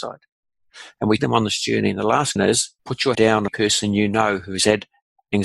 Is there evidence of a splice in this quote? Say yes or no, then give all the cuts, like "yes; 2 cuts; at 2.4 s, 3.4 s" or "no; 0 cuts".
yes; 5 cuts; at 1.2 s, 2.4 s, 2.8 s, 3.1 s, 3.5 s